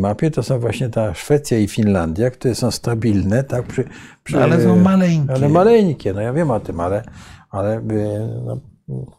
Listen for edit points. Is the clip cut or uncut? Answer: uncut